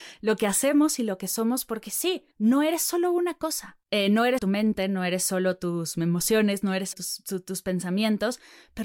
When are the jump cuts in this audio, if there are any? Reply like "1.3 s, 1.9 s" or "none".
2.3 s, 3.8 s, 4.4 s, 6.9 s